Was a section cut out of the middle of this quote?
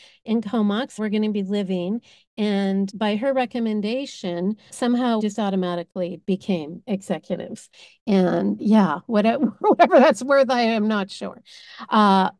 yes; 6 cuts; at 1.0 s, 2.9 s, 4.7 s, 5.2 s, 8.6 s, 9.6 s

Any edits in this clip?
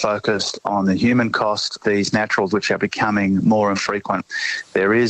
yes; 3 cuts; at 1.8 s, 2.5 s, 3.7 s

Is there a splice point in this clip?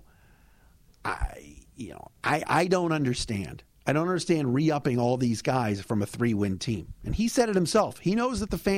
no; 0 cuts

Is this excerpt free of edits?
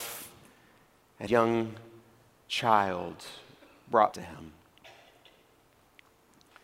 no; 2 cuts; at 1.3 s, 4.1 s

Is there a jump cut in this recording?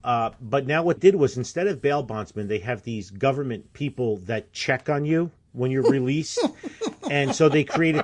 yes; 1 cut; at 1.0 s

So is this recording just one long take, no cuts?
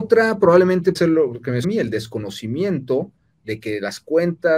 no; 2 cuts; at 1.0 s, 1.6 s

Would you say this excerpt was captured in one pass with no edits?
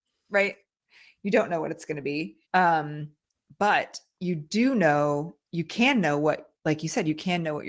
no; 2 cuts; at 2.4 s, 5.4 s

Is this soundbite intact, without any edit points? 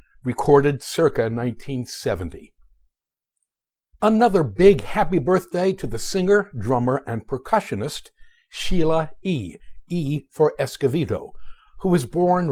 yes; 0 cuts

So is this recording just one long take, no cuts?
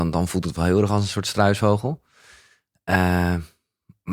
yes; 0 cuts

